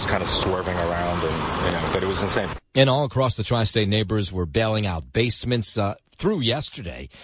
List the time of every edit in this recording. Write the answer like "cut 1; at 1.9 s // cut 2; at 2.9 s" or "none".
none

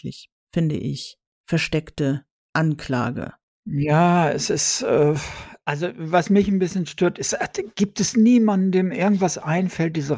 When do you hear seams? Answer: none

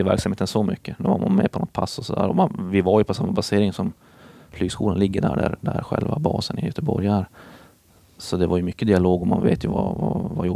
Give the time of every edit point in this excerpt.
none

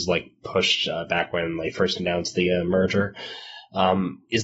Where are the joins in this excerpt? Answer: none

